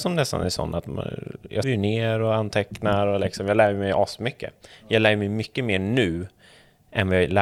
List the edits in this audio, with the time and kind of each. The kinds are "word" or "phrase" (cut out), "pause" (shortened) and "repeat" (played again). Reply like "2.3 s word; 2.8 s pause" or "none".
1.6 s word

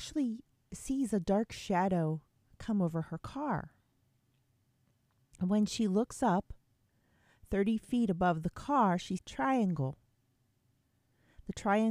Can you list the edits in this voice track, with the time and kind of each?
9.2 s phrase

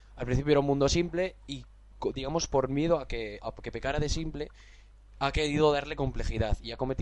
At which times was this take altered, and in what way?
3.4 s word

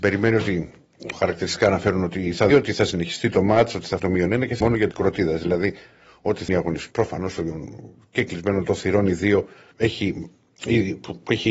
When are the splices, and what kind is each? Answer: 1.1 s word; 2.5 s word; 4.0 s word; 4.6 s word; 4.9 s word; 6.5 s word; 6.9 s word; 8.6 s word; 9.7 s word

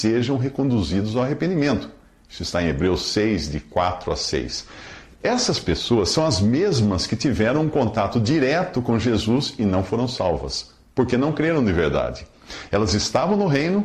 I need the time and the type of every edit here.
none

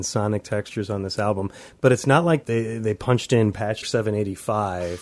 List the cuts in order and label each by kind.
2.4 s word; 3.8 s word

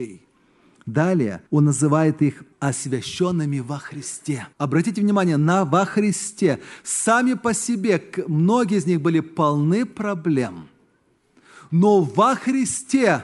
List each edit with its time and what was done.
1.5 s pause; 2.5 s pause; 4.5 s pause

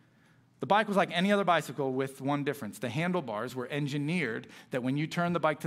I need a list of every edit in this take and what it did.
none

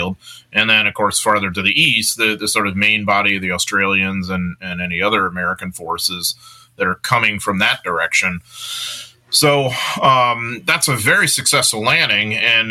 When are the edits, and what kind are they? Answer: none

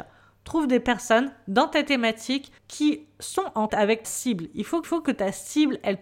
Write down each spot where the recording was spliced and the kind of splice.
2.6 s pause; 3.7 s word; 4.0 s word; 4.8 s repeat

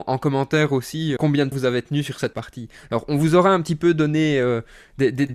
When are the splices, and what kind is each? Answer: 1.2 s word; 1.5 s word; 2.3 s word

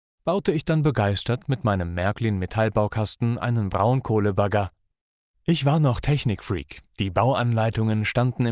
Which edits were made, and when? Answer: none

